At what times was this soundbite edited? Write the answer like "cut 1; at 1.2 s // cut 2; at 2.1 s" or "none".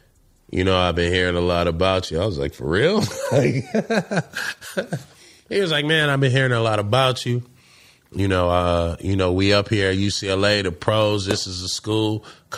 none